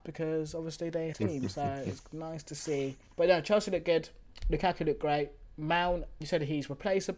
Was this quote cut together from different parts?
yes; 2 cuts; at 1.1 s, 6.2 s

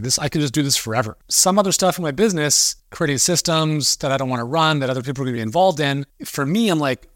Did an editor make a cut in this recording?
no; 0 cuts

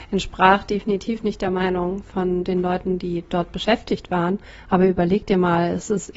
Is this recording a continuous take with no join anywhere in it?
yes; 0 cuts

